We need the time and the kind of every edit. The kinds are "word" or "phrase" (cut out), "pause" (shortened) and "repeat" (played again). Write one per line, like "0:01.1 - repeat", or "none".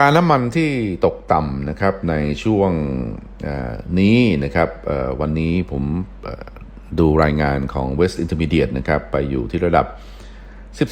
0:08.2 - word